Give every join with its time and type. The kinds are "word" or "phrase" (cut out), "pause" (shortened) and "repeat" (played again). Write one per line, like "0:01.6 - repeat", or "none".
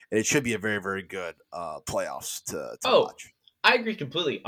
none